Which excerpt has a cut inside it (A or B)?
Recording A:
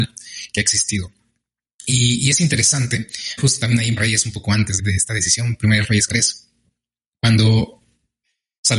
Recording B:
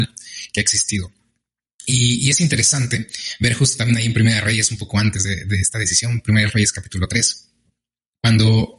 A